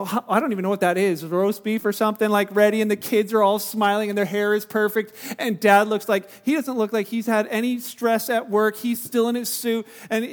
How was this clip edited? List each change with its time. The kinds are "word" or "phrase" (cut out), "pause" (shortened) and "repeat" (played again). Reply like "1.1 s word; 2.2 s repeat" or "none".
none